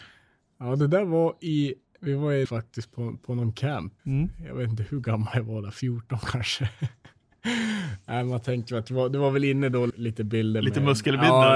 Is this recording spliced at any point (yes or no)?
yes